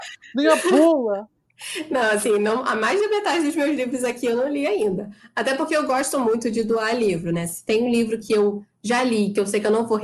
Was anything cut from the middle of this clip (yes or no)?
no